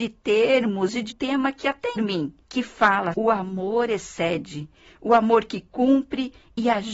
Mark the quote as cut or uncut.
cut